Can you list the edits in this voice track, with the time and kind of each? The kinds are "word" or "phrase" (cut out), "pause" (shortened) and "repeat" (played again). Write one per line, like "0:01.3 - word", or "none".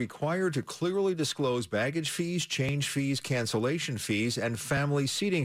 none